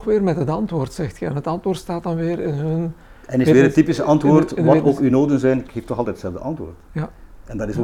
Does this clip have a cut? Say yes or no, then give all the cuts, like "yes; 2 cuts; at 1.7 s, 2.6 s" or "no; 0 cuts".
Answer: no; 0 cuts